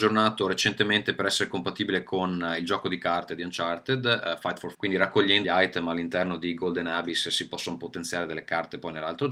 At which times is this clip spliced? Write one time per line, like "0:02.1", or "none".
0:04.7
0:05.4